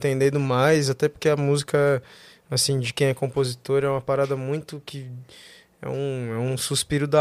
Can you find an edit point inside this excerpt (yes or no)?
no